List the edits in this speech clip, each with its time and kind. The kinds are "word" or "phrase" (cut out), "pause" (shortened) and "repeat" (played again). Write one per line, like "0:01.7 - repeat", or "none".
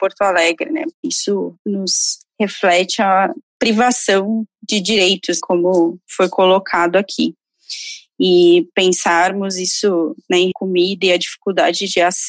0:00.9 - pause
0:05.4 - word
0:06.0 - pause
0:10.5 - phrase